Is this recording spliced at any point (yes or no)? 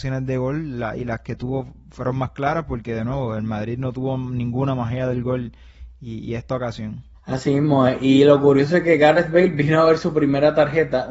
yes